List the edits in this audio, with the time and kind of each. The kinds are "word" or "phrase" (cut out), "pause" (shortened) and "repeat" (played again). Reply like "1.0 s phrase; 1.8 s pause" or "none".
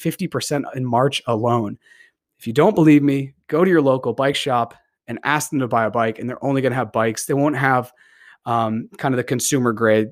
none